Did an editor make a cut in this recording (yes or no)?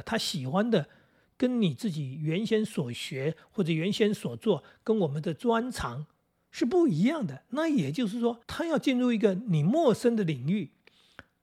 yes